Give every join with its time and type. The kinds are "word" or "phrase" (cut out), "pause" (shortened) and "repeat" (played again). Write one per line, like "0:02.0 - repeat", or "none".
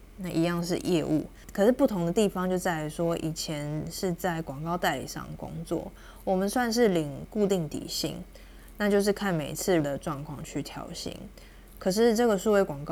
0:09.8 - word